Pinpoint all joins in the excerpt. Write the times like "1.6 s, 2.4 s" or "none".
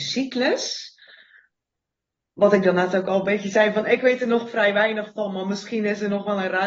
none